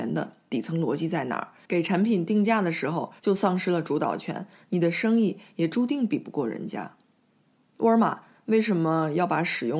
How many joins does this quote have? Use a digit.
1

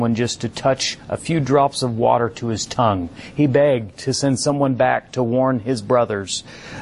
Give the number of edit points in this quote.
0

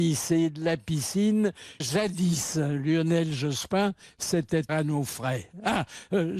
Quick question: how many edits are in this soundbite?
2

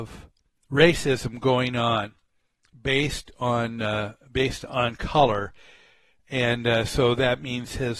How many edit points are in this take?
0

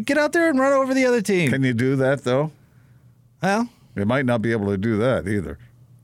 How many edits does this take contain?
0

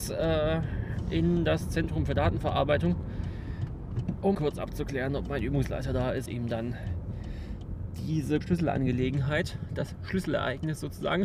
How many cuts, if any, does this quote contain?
3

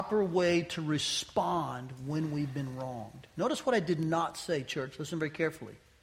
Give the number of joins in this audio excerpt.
0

